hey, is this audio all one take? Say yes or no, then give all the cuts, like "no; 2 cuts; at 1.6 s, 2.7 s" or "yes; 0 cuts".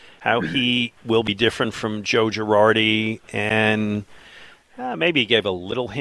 yes; 0 cuts